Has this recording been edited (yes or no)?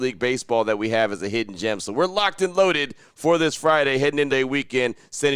yes